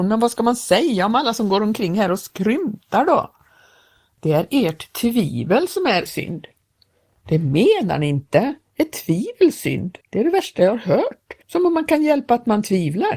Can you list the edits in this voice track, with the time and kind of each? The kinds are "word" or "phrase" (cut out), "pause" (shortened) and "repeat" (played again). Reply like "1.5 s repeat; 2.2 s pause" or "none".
6.1 s word; 10.0 s pause; 11.4 s pause